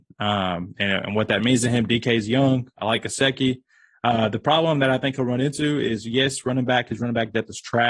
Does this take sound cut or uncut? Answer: uncut